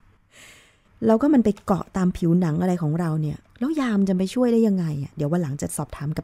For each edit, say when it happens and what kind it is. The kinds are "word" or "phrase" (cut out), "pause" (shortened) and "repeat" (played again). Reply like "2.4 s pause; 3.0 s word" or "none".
3.5 s pause